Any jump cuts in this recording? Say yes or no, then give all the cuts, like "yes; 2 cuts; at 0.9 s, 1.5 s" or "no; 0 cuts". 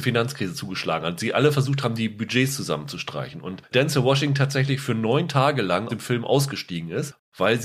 yes; 2 cuts; at 3.7 s, 5.9 s